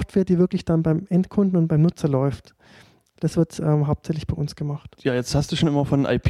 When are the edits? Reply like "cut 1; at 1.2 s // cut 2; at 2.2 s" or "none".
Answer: none